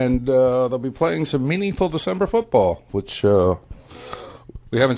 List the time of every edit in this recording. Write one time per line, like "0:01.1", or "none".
none